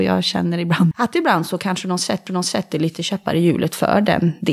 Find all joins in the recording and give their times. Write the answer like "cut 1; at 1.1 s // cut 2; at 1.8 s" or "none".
cut 1; at 0.9 s // cut 2; at 2.3 s